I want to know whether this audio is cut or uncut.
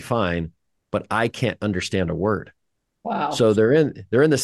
uncut